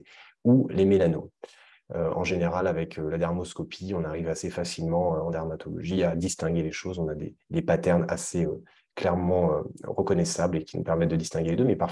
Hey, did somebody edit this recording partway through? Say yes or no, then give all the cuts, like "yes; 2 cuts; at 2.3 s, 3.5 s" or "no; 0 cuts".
no; 0 cuts